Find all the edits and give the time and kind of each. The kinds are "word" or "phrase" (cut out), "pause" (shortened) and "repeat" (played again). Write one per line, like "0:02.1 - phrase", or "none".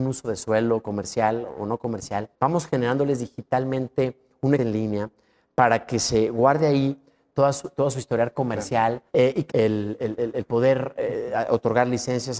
0:02.3 - pause
0:04.6 - word
0:09.1 - pause
0:09.5 - phrase